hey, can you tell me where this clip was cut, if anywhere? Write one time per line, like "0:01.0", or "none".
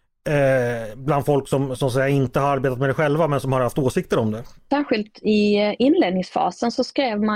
none